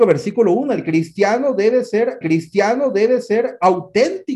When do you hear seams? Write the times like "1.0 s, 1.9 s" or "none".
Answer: 2.2 s